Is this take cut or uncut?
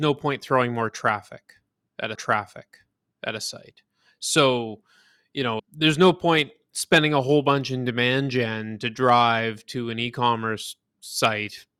cut